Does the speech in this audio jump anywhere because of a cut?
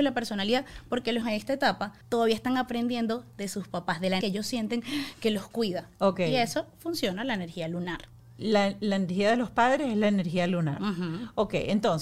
yes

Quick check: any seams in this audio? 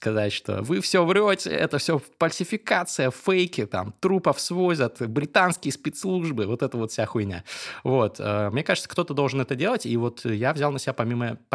no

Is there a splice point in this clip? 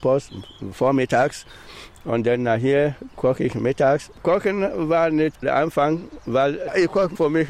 yes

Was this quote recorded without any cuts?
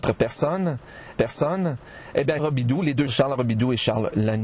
no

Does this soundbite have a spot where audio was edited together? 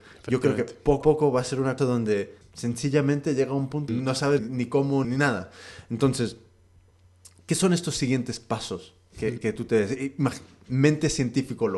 yes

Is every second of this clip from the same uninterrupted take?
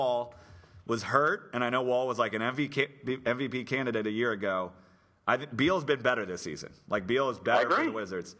yes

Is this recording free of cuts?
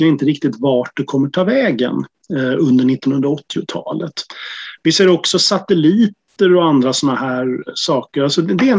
yes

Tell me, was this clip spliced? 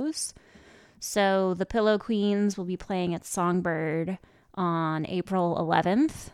no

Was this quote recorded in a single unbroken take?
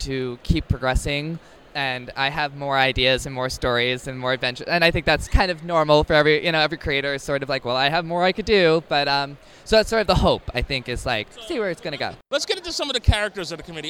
yes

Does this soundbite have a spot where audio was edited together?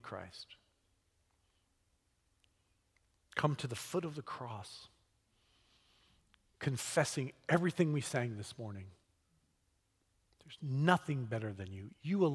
no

